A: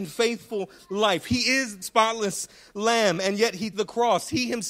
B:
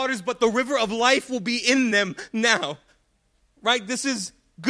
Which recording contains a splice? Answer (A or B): A